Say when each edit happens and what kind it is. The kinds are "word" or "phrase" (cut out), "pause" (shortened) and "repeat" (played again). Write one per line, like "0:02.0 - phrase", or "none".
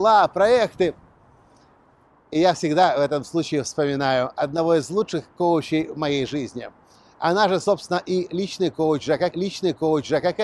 0:09.3 - repeat